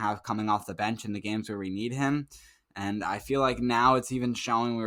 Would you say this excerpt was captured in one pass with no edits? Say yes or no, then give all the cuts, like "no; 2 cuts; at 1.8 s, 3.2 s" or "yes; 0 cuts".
yes; 0 cuts